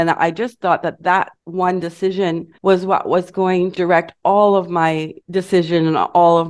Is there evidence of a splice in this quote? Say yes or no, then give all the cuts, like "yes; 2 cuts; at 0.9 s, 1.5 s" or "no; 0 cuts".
yes; 4 cuts; at 1.4 s, 2.5 s, 3.7 s, 5.2 s